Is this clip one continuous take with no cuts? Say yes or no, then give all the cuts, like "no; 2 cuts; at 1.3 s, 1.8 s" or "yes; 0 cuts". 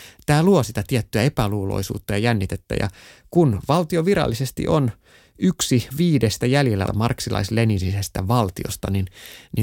no; 2 cuts; at 5.9 s, 6.9 s